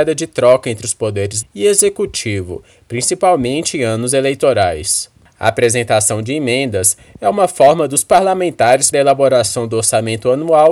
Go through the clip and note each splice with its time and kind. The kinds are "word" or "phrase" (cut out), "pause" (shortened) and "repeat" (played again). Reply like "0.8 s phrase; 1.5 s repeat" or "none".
1.4 s word; 8.9 s word